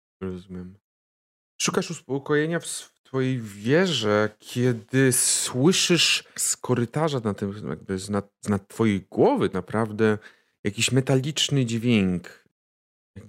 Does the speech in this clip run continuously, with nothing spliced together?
no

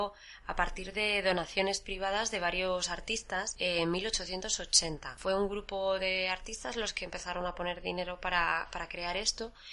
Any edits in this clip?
no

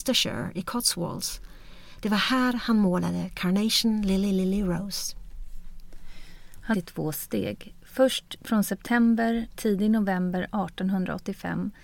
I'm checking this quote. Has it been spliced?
yes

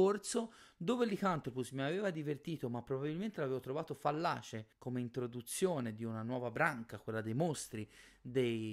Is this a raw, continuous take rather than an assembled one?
no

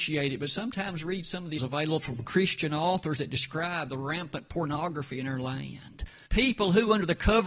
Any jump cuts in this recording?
yes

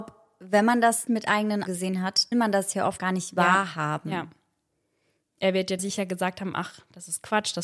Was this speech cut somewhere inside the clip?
yes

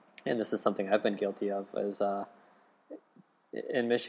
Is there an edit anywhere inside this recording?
no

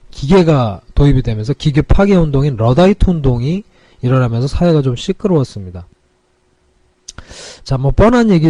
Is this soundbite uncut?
yes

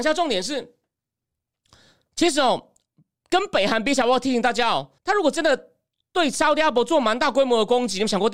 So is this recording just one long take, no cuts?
no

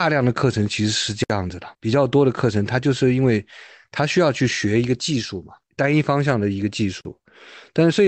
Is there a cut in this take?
yes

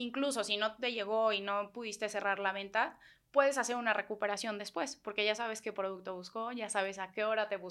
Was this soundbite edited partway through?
no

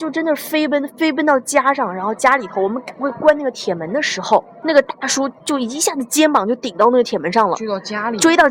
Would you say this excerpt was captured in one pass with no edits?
no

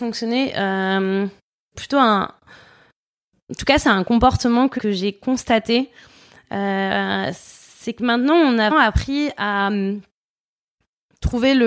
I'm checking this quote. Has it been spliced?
yes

